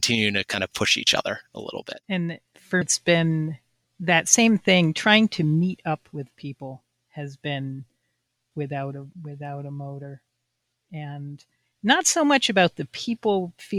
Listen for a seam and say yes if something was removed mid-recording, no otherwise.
yes